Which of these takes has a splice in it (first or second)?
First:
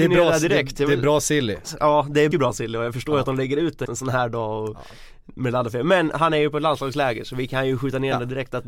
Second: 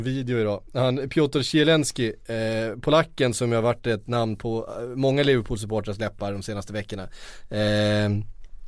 first